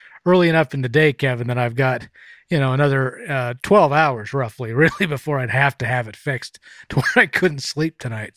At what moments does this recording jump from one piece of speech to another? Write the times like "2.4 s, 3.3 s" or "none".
none